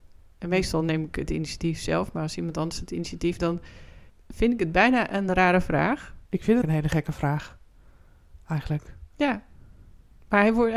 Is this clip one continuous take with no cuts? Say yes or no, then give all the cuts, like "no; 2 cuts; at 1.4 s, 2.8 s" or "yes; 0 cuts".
no; 5 cuts; at 3.4 s, 4.1 s, 6.2 s, 6.6 s, 9.1 s